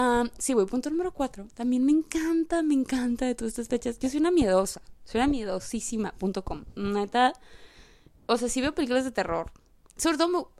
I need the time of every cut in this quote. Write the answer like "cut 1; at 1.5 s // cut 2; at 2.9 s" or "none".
none